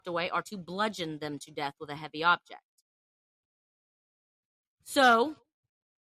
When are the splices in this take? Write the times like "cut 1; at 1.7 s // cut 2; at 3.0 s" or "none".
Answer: none

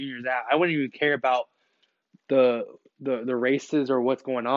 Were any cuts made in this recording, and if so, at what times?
none

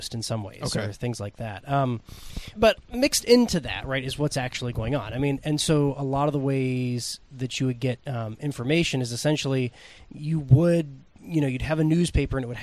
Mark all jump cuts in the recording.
cut 1; at 2.5 s // cut 2; at 8.0 s

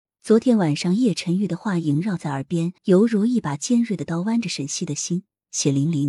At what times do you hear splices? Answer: cut 1; at 2.8 s

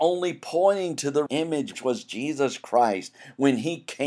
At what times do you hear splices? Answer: cut 1; at 1.3 s // cut 2; at 1.7 s

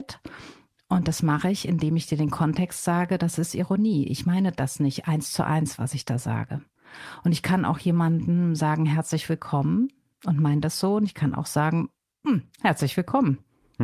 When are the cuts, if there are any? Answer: cut 1; at 12.5 s

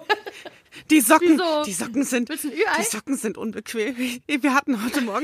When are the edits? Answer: none

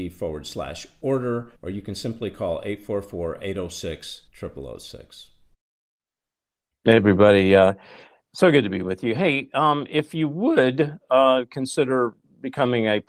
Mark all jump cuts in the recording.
cut 1; at 1.6 s // cut 2; at 4.3 s

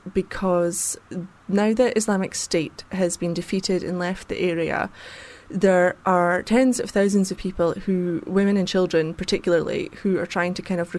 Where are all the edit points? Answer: none

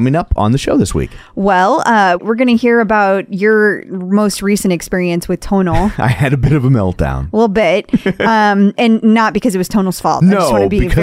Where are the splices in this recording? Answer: none

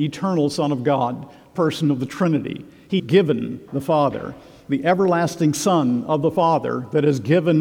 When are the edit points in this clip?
cut 1; at 1.6 s // cut 2; at 3.0 s // cut 3; at 3.7 s

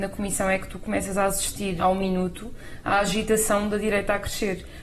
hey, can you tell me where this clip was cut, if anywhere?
cut 1; at 1.8 s

